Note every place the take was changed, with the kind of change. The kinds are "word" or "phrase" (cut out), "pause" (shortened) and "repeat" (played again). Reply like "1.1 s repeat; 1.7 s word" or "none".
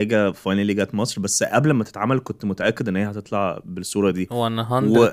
none